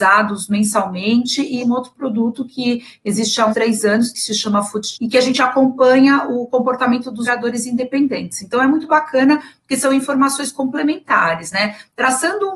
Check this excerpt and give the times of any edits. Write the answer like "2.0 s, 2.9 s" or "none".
1.6 s, 3.5 s, 4.9 s, 7.3 s